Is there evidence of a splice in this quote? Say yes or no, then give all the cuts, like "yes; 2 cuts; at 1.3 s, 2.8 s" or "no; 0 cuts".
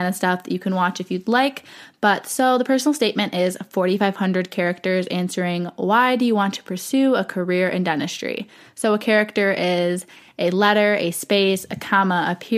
no; 0 cuts